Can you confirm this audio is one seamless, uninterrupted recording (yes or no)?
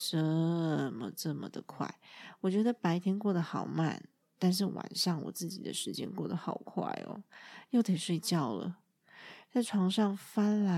yes